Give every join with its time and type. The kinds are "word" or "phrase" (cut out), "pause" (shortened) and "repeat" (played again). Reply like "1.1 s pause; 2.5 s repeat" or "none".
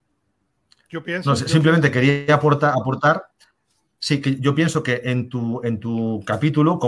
none